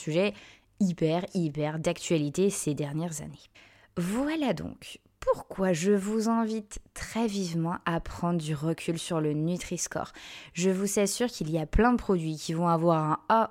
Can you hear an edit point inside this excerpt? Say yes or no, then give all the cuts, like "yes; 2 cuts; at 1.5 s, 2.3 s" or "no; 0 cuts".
yes; 1 cut; at 3.5 s